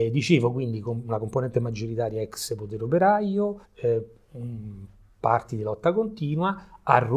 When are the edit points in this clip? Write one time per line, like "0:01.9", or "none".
0:03.6